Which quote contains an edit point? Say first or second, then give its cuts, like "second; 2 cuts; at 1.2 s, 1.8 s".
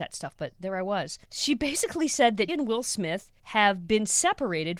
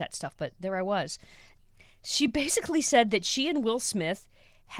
first; 3 cuts; at 1.2 s, 2.5 s, 3.4 s